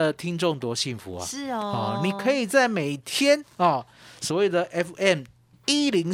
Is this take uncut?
yes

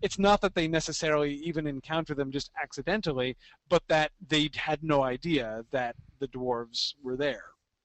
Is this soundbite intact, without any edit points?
yes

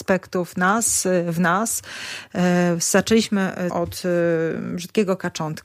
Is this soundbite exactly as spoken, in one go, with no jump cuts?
no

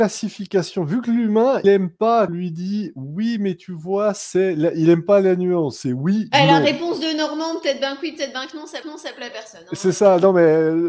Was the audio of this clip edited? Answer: yes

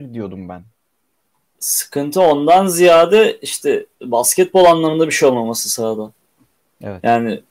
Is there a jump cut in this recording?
yes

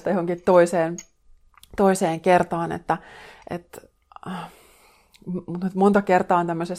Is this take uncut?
yes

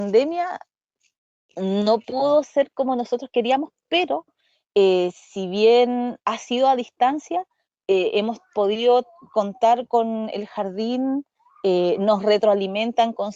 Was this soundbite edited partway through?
no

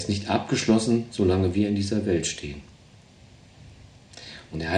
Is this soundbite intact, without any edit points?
yes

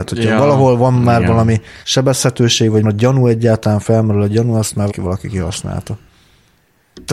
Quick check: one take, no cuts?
no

